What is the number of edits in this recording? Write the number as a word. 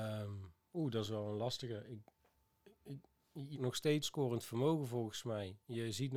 two